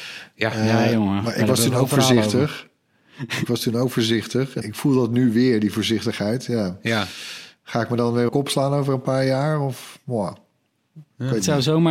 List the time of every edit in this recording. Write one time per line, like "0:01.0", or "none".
0:04.6
0:08.3